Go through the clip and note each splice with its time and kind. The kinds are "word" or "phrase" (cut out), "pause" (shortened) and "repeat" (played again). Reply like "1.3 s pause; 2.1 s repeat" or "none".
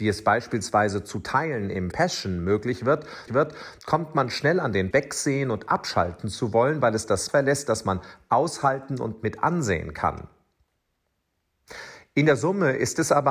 1.9 s word; 3.3 s repeat; 4.9 s word; 7.3 s word

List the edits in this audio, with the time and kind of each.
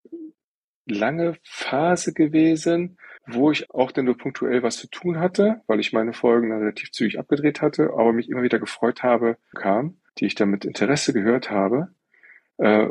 3.2 s pause; 3.7 s word; 9.5 s phrase; 10.1 s pause

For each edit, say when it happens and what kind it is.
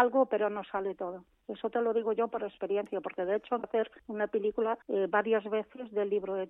3.6 s word; 4.0 s pause; 4.8 s pause

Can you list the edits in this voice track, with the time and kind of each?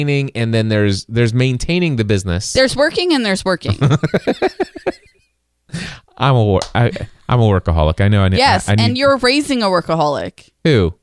none

